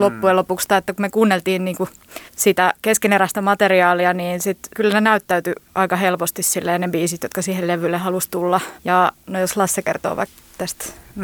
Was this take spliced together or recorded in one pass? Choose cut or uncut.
cut